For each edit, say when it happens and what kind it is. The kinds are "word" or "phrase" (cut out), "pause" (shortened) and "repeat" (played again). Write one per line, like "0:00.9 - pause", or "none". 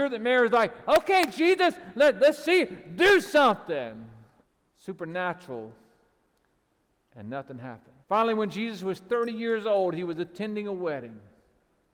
0:04.4 - pause
0:08.0 - pause